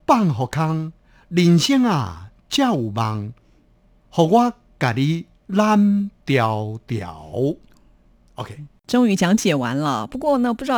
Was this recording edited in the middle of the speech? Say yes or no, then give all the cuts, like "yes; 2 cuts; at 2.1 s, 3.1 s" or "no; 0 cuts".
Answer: yes; 1 cut; at 8.9 s